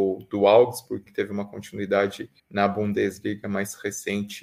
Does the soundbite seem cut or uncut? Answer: cut